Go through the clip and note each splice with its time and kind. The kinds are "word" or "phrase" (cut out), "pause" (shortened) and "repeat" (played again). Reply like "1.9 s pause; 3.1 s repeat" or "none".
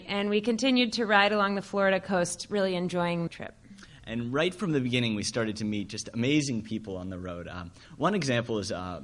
3.3 s phrase

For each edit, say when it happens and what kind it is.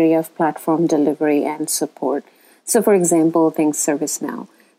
none

